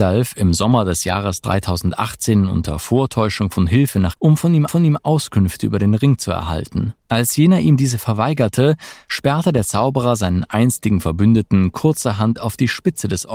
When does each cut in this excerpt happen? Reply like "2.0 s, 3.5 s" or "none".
4.1 s, 4.7 s, 7.0 s